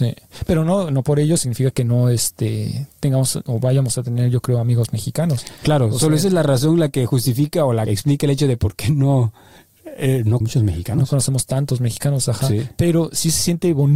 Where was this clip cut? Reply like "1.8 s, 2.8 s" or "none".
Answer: 7.9 s, 10.4 s